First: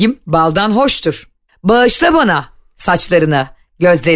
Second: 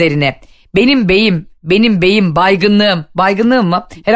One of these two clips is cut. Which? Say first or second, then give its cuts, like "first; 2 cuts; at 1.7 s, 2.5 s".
second; 1 cut; at 1.5 s